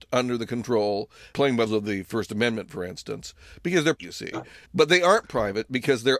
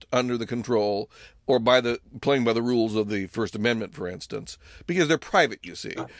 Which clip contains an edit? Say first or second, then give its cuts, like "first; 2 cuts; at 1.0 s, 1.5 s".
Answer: first; 4 cuts; at 1.3 s, 1.7 s, 3.9 s, 4.6 s